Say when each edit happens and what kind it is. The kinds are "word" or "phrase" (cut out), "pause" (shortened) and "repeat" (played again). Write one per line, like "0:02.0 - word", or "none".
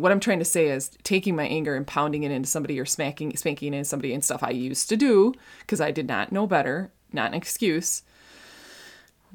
none